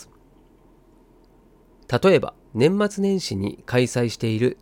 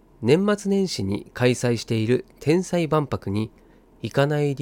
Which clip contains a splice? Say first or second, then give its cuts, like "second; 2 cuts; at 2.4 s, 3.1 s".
first; 1 cut; at 2.5 s